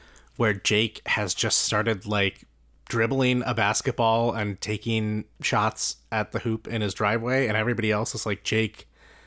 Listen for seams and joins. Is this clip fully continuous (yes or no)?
yes